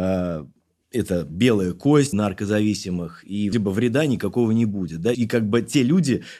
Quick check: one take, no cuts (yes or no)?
no